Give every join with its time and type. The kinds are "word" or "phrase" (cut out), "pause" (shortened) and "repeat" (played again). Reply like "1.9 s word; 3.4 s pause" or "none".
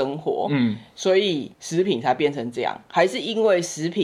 1.5 s pause